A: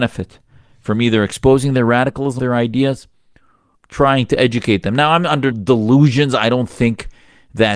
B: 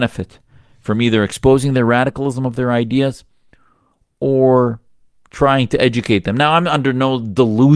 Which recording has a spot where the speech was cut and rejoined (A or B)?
A